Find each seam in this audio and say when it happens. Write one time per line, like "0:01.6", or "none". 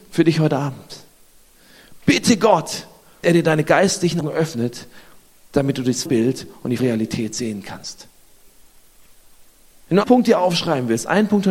0:03.2
0:04.2
0:06.1
0:06.8
0:10.0